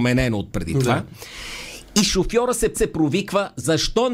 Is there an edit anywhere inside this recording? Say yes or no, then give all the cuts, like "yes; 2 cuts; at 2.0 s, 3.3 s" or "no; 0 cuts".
yes; 1 cut; at 2.7 s